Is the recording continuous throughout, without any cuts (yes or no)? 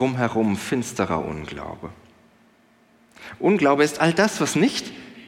yes